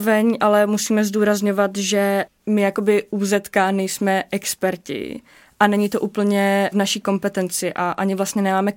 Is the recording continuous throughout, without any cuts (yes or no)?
yes